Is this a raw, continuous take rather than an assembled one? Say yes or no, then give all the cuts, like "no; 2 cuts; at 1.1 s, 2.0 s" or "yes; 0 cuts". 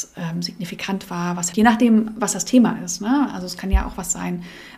no; 1 cut; at 1.5 s